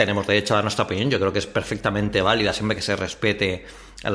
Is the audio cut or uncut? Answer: uncut